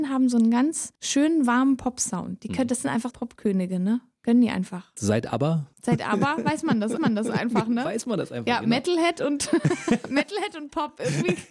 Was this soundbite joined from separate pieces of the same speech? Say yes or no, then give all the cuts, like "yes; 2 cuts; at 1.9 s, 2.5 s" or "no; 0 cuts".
yes; 2 cuts; at 3.1 s, 7.0 s